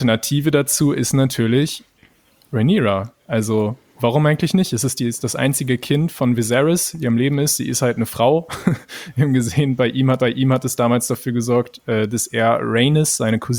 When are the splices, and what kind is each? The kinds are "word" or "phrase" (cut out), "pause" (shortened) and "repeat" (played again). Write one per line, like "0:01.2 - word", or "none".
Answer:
0:10.2 - repeat